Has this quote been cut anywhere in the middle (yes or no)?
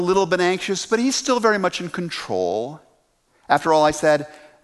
no